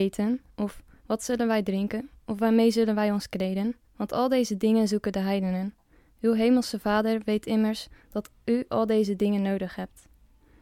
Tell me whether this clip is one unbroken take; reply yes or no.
no